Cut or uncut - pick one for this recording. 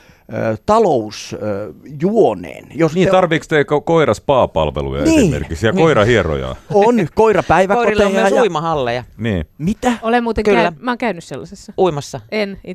cut